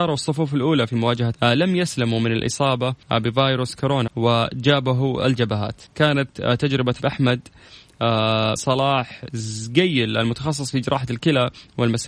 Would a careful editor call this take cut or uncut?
cut